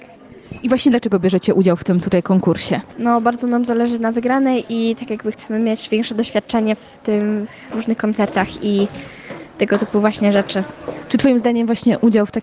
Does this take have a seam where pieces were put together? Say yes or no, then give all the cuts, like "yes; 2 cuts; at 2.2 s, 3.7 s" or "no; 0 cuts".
yes; 1 cut; at 2.9 s